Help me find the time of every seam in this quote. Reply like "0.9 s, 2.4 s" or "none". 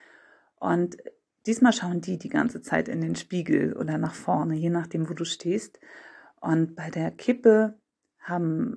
none